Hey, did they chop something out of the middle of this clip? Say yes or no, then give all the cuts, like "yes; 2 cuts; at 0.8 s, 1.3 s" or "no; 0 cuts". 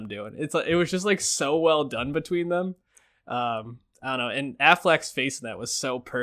yes; 1 cut; at 3.9 s